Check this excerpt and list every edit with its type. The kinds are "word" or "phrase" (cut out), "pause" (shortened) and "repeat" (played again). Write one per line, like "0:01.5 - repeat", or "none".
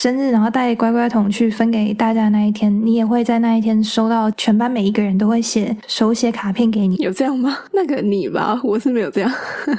0:07.0 - word